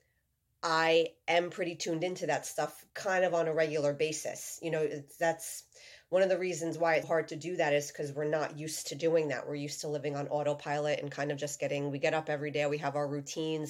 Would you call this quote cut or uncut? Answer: cut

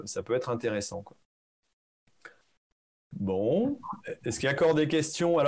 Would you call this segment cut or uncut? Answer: uncut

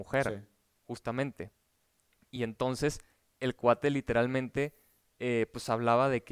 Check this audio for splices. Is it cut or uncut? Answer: uncut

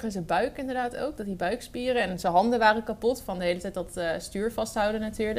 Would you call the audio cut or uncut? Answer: uncut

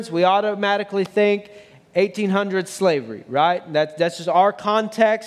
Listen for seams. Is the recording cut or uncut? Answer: uncut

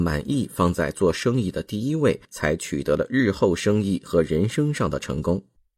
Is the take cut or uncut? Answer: cut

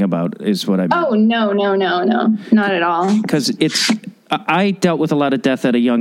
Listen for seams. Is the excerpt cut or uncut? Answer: uncut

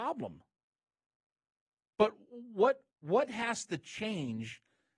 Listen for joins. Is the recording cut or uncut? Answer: cut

